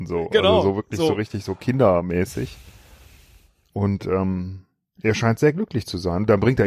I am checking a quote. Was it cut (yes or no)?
no